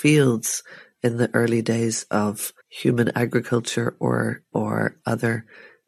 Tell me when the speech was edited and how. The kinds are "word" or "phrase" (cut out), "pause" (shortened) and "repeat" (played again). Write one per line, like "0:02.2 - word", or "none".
0:02.6 - pause
0:04.5 - word